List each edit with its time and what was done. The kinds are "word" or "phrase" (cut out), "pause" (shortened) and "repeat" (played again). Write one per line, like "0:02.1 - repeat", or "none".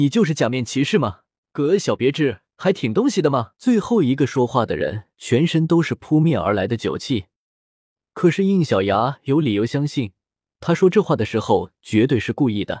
0:01.4 - pause
0:03.6 - pause
0:05.1 - pause